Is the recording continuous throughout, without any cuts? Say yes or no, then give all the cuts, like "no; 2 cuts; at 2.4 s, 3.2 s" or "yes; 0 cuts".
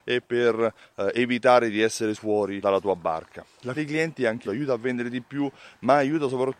no; 4 cuts; at 2.1 s, 2.6 s, 3.7 s, 4.4 s